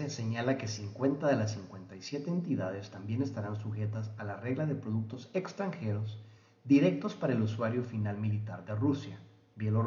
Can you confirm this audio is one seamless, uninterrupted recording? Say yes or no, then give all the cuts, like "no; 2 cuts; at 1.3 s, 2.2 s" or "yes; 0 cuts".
yes; 0 cuts